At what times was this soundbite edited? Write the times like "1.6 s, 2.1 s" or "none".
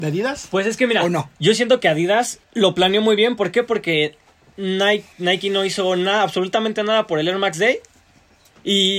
1.3 s, 2.4 s, 5.1 s